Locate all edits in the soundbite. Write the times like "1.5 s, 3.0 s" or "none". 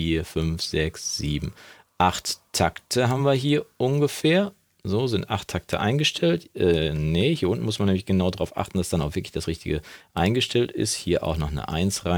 none

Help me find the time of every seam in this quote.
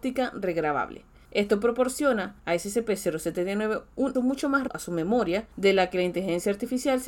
2.4 s, 4.1 s, 4.7 s, 5.5 s

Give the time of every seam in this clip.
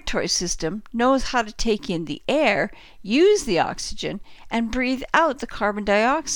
none

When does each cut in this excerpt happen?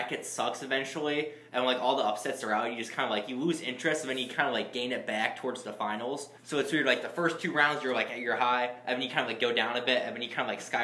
6.4 s

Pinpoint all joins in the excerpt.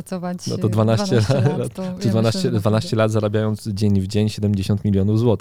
none

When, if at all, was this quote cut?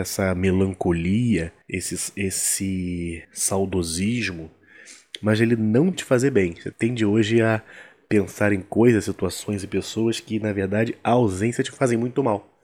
1.6 s, 3.2 s, 5.9 s, 6.7 s

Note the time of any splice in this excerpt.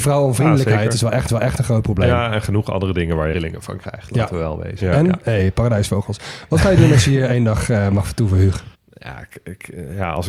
1.3 s, 3.3 s, 8.7 s

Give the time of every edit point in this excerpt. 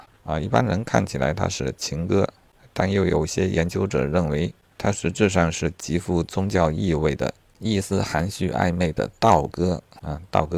none

